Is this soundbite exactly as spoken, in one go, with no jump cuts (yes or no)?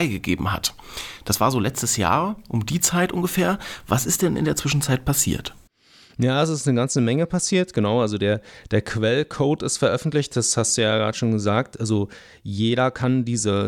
yes